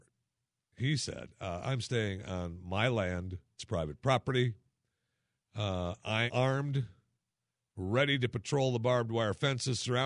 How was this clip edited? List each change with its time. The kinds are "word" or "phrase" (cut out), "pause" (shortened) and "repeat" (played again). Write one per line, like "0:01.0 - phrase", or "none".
0:06.3 - word